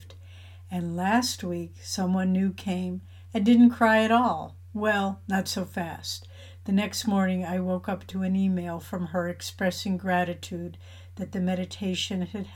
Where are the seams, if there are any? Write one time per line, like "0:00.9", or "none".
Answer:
none

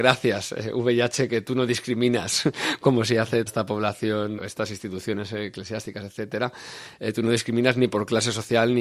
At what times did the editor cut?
0:03.5
0:04.4

